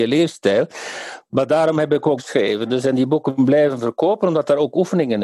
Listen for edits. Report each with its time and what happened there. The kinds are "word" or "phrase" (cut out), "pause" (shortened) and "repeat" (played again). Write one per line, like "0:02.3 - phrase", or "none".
0:02.2 - word